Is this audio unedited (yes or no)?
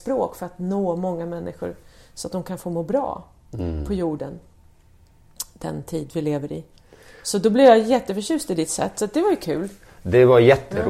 yes